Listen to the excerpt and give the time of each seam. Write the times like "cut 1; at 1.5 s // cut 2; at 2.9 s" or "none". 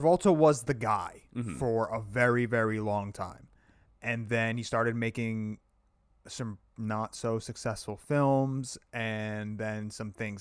none